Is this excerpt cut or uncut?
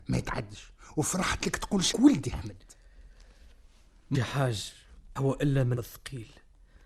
cut